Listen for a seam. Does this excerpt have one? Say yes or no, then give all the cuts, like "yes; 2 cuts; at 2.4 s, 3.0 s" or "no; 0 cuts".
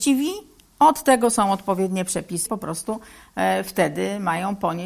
yes; 1 cut; at 2.5 s